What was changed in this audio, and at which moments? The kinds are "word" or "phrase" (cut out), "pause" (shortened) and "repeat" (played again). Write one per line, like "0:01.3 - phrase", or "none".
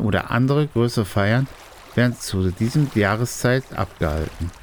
none